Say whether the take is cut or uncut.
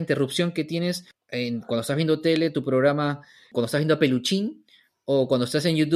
uncut